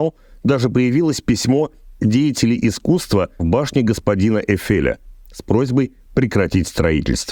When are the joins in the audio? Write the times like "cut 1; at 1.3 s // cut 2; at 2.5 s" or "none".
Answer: cut 1; at 2.0 s // cut 2; at 3.4 s